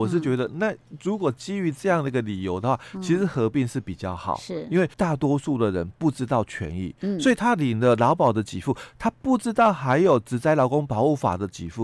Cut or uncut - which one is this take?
cut